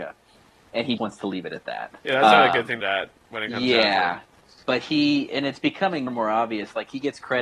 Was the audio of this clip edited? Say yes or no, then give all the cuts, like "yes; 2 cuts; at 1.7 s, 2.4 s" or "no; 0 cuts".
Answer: yes; 5 cuts; at 1.0 s, 2.0 s, 2.8 s, 4.6 s, 6.1 s